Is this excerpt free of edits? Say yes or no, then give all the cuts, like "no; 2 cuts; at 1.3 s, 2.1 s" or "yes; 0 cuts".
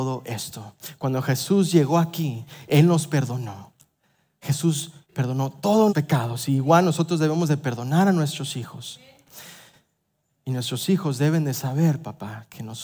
no; 2 cuts; at 5.0 s, 5.9 s